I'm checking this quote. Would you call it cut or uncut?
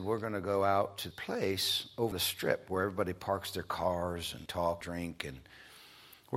cut